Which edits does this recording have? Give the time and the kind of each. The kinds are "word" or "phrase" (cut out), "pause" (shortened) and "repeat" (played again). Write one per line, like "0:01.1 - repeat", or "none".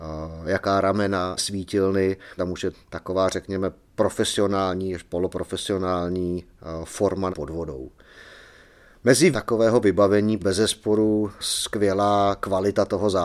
0:01.4 - word
0:02.4 - word
0:02.7 - word
0:07.3 - word
0:09.3 - word
0:10.4 - word